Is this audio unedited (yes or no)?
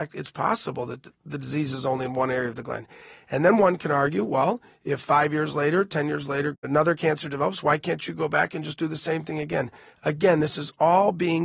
yes